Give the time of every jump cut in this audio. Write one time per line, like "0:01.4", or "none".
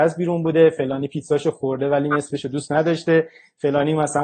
none